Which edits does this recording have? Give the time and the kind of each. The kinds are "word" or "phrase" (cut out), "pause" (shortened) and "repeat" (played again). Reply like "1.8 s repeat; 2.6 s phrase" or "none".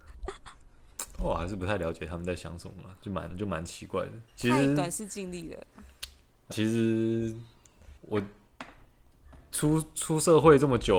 4.3 s pause; 6.5 s word; 8.0 s pause